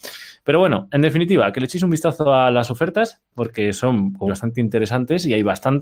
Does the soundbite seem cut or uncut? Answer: cut